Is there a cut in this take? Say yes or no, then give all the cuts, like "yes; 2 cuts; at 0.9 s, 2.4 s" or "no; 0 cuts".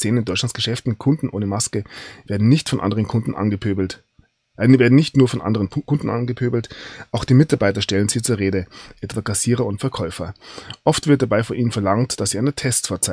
no; 0 cuts